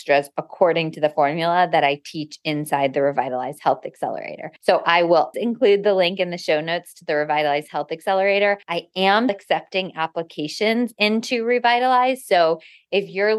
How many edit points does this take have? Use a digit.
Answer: 4